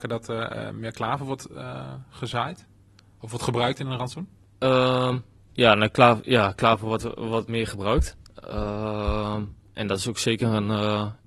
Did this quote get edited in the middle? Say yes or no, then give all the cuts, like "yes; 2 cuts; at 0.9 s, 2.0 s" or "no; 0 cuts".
no; 0 cuts